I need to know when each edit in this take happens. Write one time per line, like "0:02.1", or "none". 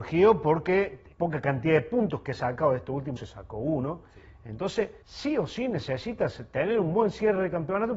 0:01.1
0:03.2
0:05.0

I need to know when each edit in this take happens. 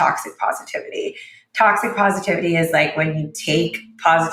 none

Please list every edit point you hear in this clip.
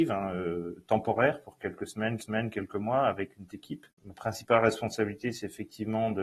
0:02.2
0:03.5

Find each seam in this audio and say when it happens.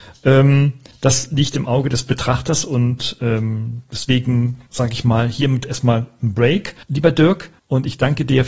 0:04.7
0:06.8
0:07.6

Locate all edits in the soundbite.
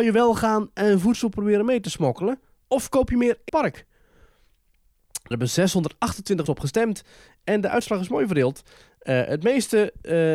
0:03.5
0:05.3
0:06.5

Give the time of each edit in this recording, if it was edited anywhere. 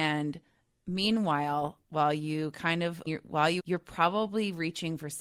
0:03.1
0:03.6

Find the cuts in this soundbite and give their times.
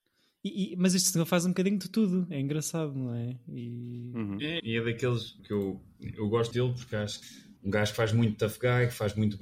0:04.6
0:05.4
0:06.5
0:07.2
0:07.6

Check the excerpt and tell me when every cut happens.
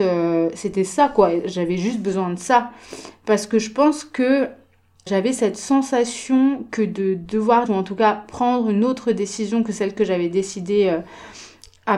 0:05.1
0:07.7

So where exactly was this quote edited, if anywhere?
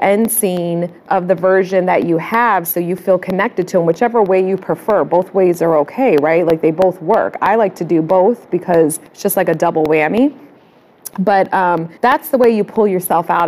0:01.0
0:09.1
0:12.0

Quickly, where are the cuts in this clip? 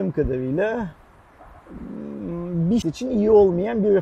0:02.8

